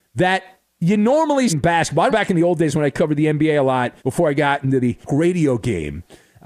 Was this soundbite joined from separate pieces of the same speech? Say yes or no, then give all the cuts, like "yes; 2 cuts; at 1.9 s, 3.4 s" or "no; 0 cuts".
yes; 4 cuts; at 1.5 s, 2.1 s, 4.0 s, 5.1 s